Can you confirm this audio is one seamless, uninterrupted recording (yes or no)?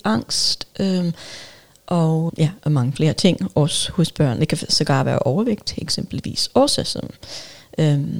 no